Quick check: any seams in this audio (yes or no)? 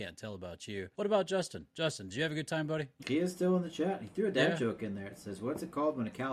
yes